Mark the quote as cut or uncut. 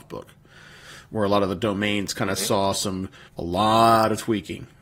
cut